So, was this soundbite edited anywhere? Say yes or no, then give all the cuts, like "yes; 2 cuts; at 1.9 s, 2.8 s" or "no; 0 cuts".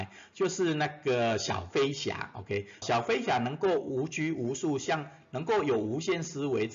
yes; 1 cut; at 2.8 s